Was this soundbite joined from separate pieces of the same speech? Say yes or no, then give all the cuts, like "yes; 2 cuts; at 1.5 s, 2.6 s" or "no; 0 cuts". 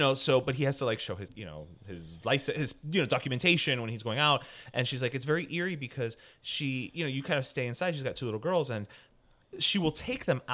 yes; 1 cut; at 1.3 s